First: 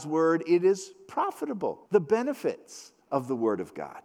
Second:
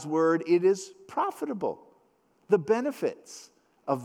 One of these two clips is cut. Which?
first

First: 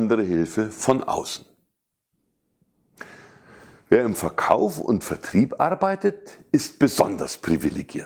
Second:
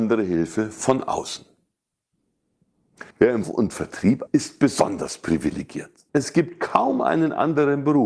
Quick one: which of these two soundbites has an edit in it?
second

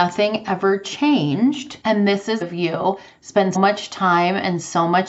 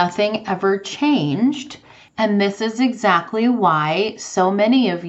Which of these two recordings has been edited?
first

